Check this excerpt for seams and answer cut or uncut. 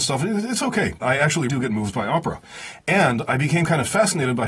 cut